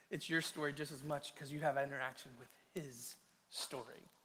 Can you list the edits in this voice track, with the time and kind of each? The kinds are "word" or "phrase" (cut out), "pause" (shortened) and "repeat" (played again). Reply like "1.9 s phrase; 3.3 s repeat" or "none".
none